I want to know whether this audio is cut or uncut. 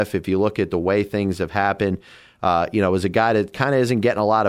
uncut